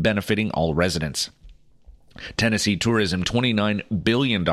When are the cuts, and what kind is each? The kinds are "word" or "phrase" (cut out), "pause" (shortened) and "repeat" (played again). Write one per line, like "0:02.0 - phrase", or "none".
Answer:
0:03.2 - word